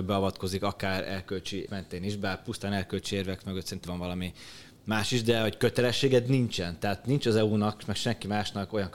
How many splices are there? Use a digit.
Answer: 2